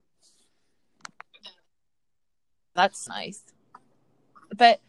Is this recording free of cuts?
no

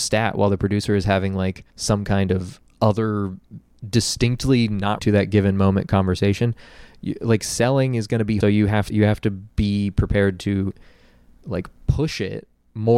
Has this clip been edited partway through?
yes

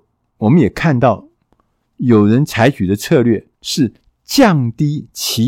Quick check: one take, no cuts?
no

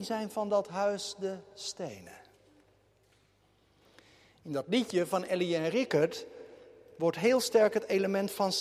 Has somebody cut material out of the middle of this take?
no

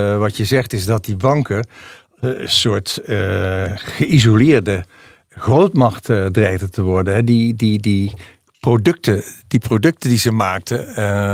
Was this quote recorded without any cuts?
yes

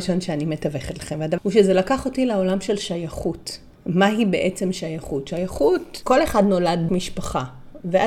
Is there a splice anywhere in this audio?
yes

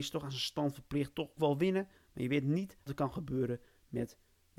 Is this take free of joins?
no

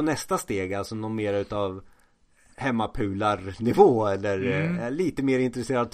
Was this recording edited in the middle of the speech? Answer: no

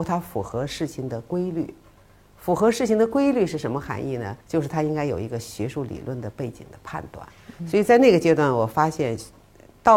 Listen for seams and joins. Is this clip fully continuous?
no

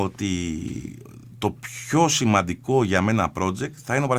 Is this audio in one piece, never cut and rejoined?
yes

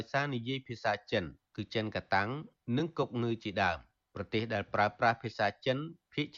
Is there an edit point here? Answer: no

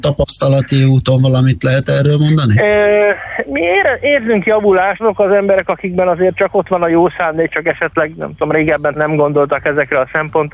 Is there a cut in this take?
yes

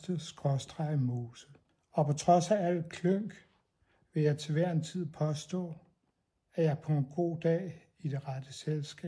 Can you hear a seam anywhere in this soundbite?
no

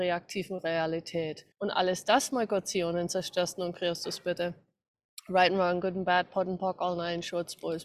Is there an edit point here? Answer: yes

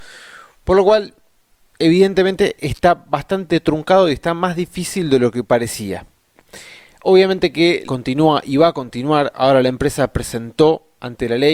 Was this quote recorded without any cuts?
no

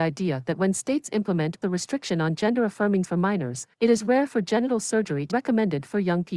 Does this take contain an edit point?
yes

